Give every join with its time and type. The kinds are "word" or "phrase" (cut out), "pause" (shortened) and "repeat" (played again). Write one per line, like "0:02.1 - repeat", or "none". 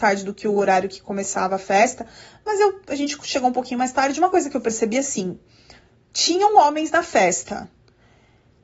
none